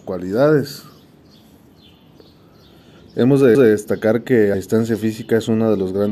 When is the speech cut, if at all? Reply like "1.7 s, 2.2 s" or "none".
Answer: 3.5 s, 4.5 s